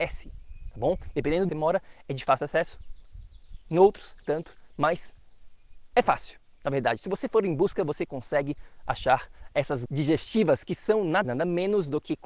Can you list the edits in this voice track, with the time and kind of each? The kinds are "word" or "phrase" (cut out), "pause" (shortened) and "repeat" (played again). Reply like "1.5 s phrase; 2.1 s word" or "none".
1.5 s phrase; 4.2 s word; 9.9 s word; 11.2 s word

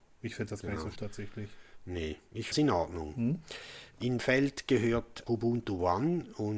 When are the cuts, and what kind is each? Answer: 1.0 s phrase; 2.5 s phrase; 4.2 s phrase; 5.3 s word

